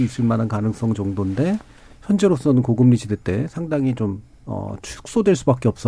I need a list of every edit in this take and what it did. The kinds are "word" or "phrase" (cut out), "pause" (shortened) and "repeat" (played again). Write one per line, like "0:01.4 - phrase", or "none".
none